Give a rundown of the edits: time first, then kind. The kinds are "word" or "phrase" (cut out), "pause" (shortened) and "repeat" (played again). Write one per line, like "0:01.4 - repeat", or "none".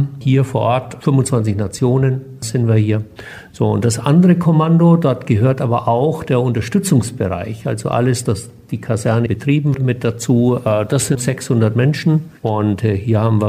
0:08.3 - word
0:09.3 - word
0:09.7 - word
0:11.2 - word
0:12.4 - pause